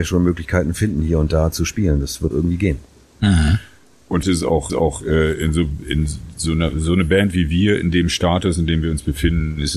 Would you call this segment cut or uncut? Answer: cut